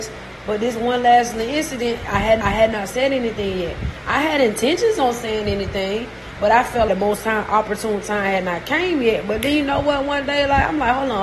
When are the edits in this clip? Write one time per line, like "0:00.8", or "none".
0:02.4
0:06.9